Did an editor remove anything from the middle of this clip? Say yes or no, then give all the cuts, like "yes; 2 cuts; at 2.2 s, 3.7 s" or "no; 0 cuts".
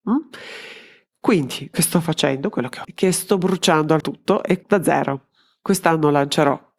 yes; 4 cuts; at 1.7 s, 2.8 s, 4.0 s, 4.6 s